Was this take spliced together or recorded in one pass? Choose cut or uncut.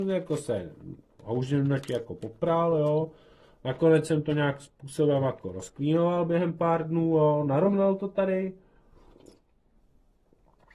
uncut